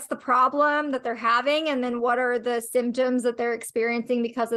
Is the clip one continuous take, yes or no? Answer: yes